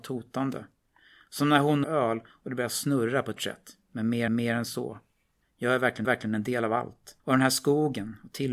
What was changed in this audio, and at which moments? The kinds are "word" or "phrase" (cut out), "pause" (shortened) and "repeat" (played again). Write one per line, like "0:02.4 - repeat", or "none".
0:01.8 - phrase
0:03.4 - word
0:04.3 - repeat
0:05.4 - pause
0:06.0 - repeat
0:07.2 - pause